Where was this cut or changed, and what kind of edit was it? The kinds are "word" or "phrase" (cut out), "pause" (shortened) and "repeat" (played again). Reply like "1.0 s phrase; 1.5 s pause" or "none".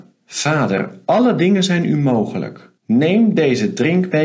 2.8 s pause